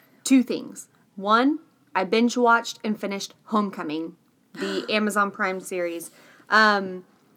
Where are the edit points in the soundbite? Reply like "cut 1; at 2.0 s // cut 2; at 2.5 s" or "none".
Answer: none